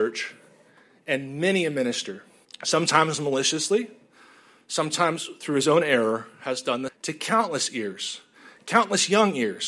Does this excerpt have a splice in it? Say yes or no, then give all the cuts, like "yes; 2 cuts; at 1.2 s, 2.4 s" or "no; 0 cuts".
yes; 2 cuts; at 2.4 s, 6.9 s